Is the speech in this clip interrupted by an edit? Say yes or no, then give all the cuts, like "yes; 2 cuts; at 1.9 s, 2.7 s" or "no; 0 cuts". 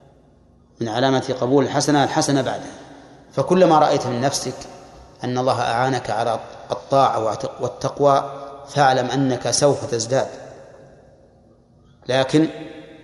no; 0 cuts